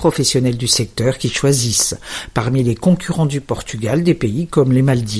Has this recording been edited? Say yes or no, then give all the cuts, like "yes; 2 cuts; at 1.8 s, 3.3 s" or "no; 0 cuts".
no; 0 cuts